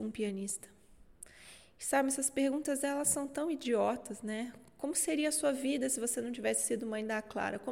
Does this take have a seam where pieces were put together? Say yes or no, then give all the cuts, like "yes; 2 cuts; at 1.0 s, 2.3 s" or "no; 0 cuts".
no; 0 cuts